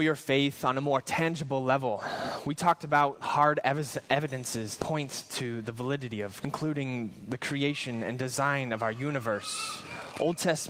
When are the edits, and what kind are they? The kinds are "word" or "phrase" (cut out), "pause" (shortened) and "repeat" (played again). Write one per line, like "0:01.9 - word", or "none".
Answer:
0:03.2 - word
0:04.8 - word
0:06.4 - word